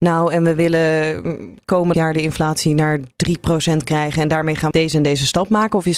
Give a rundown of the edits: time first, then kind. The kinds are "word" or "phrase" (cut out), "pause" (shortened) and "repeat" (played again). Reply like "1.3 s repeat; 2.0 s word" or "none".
1.9 s word; 4.7 s word